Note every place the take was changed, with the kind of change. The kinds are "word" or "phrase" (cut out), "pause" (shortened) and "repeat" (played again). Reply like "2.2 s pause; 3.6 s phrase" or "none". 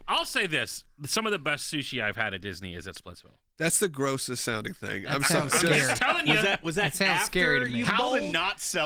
0.9 s pause